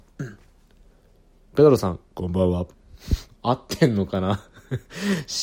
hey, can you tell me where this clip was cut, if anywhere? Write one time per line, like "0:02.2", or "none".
0:02.7